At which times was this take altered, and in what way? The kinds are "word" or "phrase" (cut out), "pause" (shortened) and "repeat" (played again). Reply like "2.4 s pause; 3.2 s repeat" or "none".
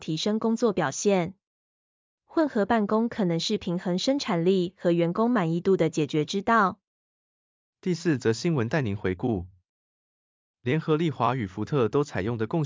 none